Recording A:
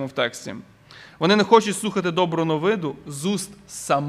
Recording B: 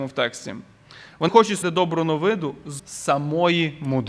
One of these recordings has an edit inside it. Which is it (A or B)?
B